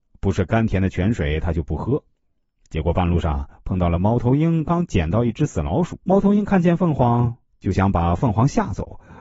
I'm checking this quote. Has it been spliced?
yes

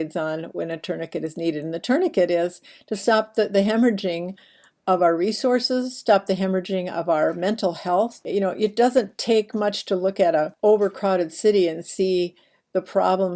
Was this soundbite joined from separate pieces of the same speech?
no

